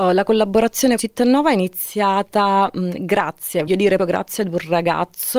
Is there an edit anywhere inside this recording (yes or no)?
yes